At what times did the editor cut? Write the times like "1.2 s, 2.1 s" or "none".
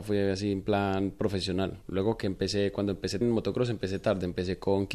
1.8 s, 3.2 s